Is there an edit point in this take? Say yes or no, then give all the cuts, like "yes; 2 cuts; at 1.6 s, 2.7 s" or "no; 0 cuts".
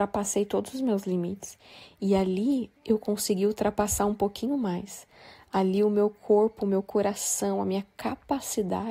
yes; 1 cut; at 2.8 s